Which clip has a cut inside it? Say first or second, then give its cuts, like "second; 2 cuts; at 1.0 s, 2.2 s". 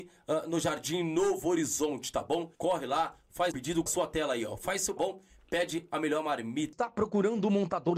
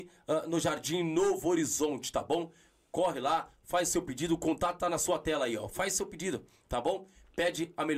first; 4 cuts; at 2.5 s, 3.5 s, 3.9 s, 5.0 s